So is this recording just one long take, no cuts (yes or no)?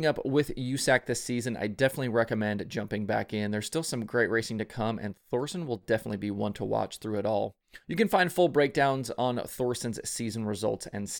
no